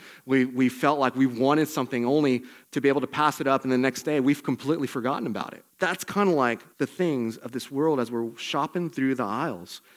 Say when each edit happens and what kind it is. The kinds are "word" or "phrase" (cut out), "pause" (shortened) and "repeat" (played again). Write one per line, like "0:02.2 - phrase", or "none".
0:02.6 - pause
0:05.7 - pause
0:06.7 - pause